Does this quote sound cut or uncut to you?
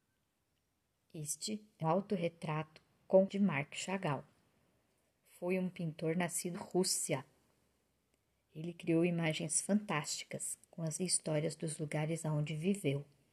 cut